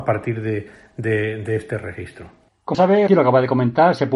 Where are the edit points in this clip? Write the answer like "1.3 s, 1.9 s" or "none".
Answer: 2.7 s, 3.1 s